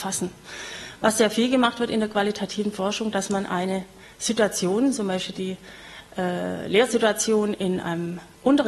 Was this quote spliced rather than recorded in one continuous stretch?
no; 0 cuts

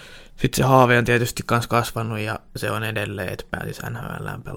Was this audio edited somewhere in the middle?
yes; 1 cut; at 2.5 s

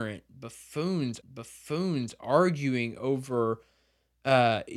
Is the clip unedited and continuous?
no; 1 cut; at 1.2 s

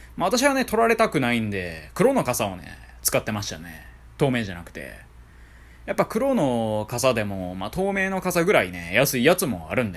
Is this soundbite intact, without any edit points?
yes; 0 cuts

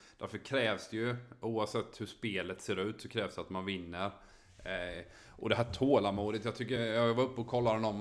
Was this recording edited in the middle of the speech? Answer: no; 0 cuts

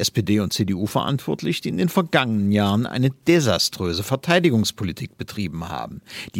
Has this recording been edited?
no; 0 cuts

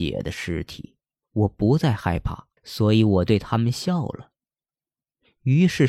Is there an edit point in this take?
yes; 2 cuts; at 1.0 s, 2.6 s

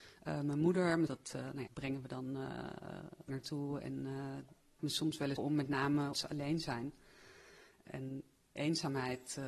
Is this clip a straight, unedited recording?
no; 7 cuts; at 1.1 s, 1.7 s, 3.3 s, 4.8 s, 5.4 s, 6.1 s, 8.6 s

